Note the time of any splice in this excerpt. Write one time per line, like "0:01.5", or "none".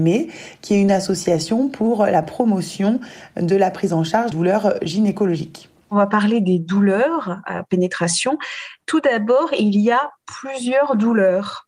0:04.3